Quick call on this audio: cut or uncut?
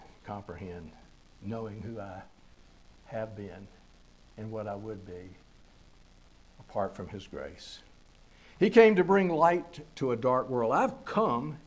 uncut